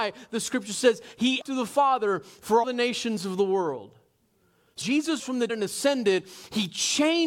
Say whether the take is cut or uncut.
cut